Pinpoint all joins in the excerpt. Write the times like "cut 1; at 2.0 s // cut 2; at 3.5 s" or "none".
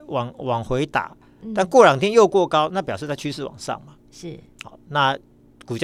none